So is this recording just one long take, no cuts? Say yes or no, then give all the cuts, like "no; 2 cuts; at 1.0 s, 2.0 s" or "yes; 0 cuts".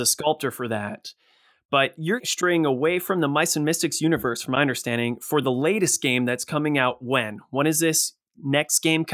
yes; 0 cuts